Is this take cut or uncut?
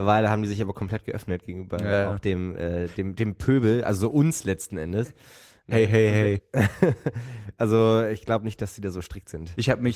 uncut